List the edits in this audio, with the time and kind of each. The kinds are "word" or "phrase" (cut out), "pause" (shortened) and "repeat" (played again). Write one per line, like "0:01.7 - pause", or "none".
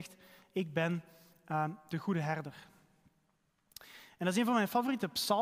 none